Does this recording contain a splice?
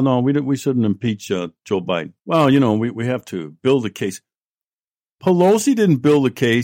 yes; 1 cut; at 2.2 s

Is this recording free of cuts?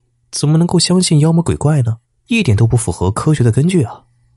no; 1 cut; at 2.0 s

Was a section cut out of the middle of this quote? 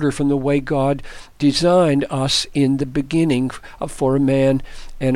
no; 0 cuts

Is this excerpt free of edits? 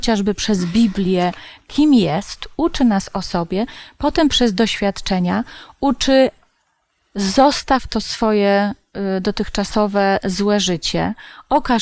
yes; 0 cuts

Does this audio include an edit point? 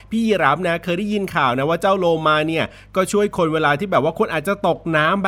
no; 0 cuts

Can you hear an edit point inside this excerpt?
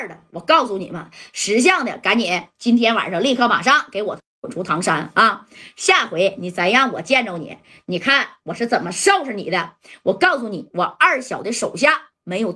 no; 0 cuts

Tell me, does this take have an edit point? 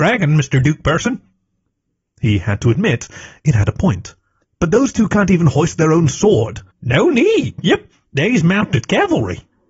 yes; 2 cuts; at 4.4 s, 6.7 s

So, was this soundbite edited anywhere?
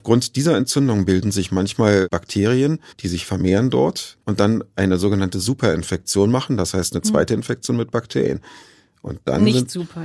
yes; 2 cuts; at 2.9 s, 4.2 s

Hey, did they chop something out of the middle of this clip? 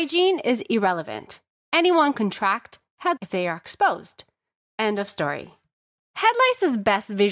yes; 2 cuts; at 2.1 s, 3.2 s

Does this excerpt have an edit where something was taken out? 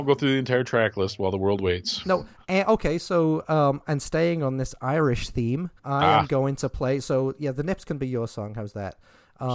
yes; 1 cut; at 5.8 s

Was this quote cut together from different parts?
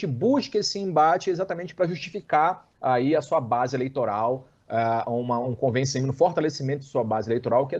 no; 0 cuts

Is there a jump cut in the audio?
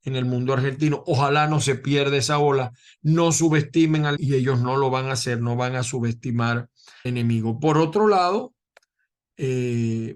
yes; 2 cuts; at 4.2 s, 7.1 s

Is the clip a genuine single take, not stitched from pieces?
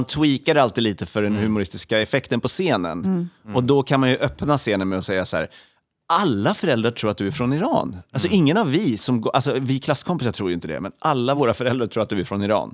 yes; 0 cuts

